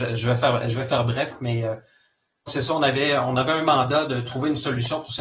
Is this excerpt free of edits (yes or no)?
no